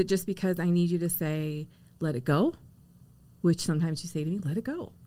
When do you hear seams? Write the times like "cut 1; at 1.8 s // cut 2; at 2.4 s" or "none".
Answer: none